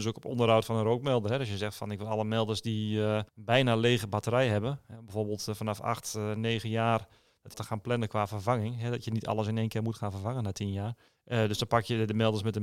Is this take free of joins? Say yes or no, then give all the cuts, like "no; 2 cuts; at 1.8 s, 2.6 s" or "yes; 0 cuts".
no; 3 cuts; at 3.3 s, 7.5 s, 11.1 s